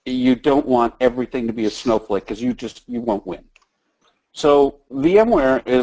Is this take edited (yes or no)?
yes